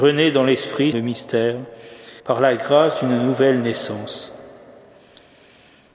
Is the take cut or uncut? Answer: cut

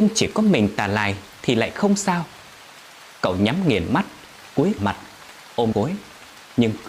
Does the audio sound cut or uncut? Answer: cut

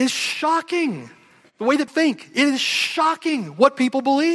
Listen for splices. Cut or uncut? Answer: cut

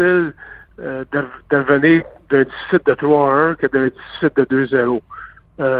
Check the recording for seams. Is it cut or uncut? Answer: uncut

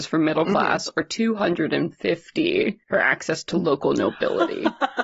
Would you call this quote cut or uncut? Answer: cut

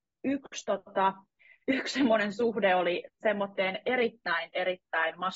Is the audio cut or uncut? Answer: uncut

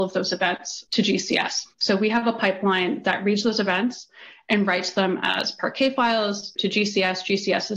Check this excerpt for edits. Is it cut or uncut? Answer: cut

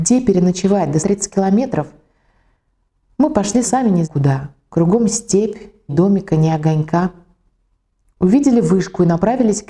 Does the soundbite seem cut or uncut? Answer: cut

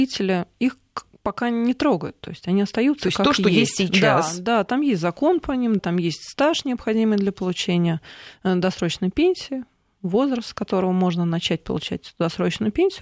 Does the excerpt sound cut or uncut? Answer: cut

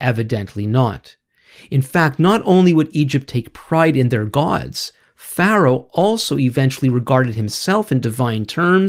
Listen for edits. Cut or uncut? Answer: uncut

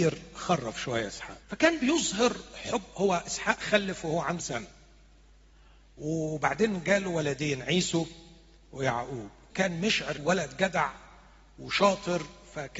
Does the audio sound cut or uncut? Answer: cut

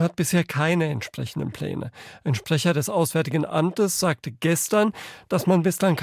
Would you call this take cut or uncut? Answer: uncut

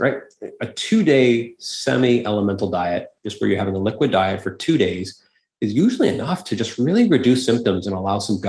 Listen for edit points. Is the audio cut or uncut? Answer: uncut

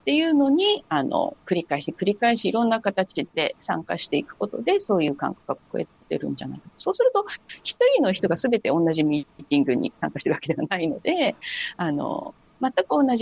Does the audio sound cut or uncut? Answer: cut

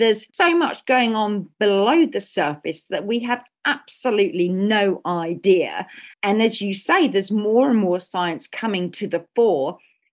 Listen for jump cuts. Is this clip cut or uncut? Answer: cut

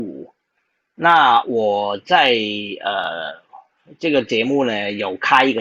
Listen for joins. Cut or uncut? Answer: uncut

